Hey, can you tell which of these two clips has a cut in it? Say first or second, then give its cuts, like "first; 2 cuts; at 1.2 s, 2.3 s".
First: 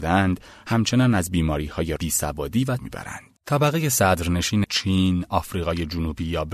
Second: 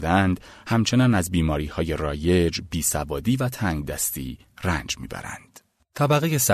first; 4 cuts; at 2.0 s, 2.8 s, 3.4 s, 4.6 s